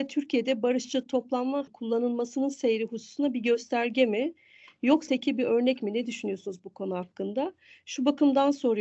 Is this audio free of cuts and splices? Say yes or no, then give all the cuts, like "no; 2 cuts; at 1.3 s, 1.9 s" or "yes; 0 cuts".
no; 2 cuts; at 1.7 s, 5.1 s